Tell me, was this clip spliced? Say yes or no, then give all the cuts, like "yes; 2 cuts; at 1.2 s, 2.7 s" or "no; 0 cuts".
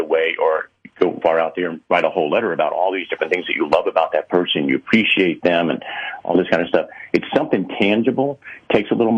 yes; 1 cut; at 1.2 s